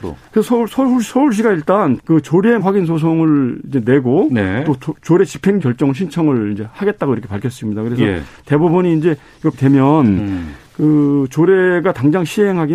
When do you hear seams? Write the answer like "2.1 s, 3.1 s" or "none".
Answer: 2.0 s, 2.6 s, 5.6 s, 9.5 s